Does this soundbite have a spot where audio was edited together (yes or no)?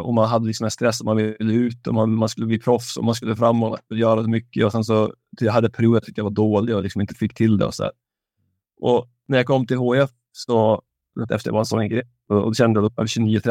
yes